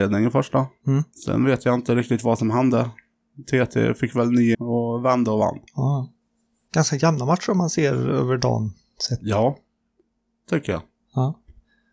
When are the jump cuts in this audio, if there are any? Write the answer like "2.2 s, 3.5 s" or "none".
1.1 s, 4.5 s, 5.7 s